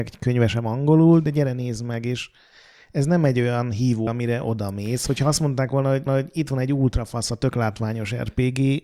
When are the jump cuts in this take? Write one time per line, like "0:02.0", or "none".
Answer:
0:04.1
0:06.1